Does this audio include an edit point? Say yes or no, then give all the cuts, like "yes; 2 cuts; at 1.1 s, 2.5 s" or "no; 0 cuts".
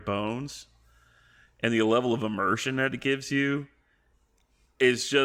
no; 0 cuts